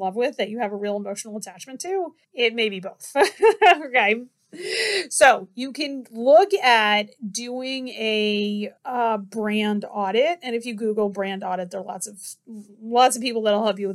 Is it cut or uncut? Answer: cut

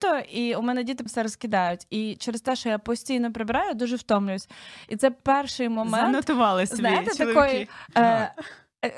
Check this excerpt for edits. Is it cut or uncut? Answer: cut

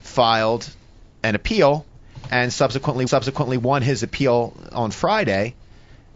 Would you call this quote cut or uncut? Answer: cut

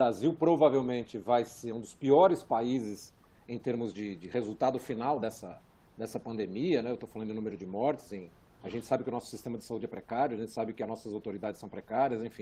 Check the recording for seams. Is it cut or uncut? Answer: uncut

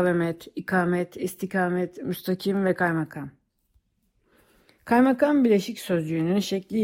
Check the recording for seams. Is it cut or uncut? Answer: uncut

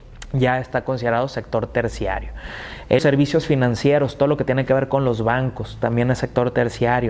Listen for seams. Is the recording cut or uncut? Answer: cut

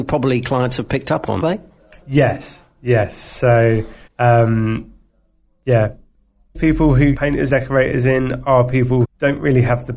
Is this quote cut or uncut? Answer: cut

